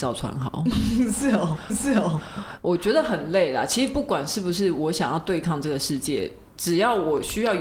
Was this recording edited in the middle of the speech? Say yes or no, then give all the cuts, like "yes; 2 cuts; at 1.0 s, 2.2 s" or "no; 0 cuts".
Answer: yes; 1 cut; at 1.7 s